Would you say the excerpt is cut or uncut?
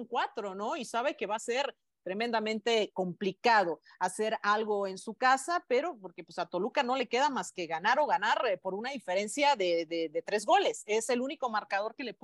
uncut